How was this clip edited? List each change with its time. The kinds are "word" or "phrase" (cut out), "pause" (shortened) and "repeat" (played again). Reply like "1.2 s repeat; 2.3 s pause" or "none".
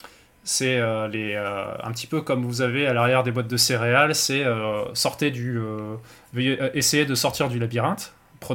none